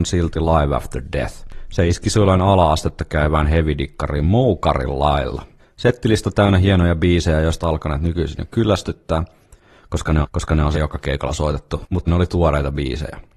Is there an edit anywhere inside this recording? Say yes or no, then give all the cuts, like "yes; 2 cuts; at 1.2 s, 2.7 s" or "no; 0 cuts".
yes; 5 cuts; at 5.6 s, 7.6 s, 10.2 s, 10.7 s, 12.1 s